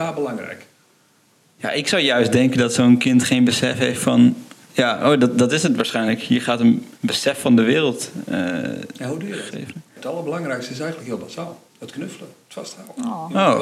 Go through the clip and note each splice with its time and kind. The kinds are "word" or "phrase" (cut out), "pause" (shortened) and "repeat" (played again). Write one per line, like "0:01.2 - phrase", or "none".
0:04.6 - pause
0:07.0 - pause
0:11.7 - pause